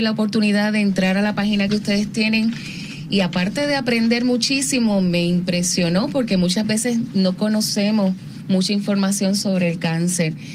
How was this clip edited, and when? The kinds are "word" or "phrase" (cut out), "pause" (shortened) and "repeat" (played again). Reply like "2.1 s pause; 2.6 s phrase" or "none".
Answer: none